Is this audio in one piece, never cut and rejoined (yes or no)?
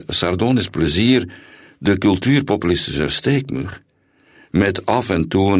yes